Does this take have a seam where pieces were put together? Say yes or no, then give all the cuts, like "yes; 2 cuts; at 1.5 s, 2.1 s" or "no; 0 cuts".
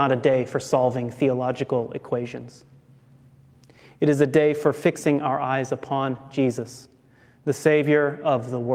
no; 0 cuts